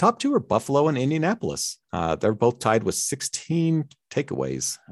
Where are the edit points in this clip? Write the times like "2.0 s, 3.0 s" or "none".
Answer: 1.8 s